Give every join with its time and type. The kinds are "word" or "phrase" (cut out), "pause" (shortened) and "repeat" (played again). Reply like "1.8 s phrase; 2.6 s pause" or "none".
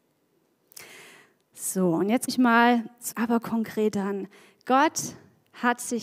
2.3 s word; 3.1 s word